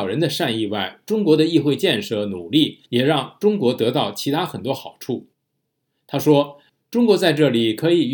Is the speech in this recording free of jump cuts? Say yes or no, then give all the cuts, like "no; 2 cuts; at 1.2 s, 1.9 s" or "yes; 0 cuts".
no; 2 cuts; at 2.9 s, 5.3 s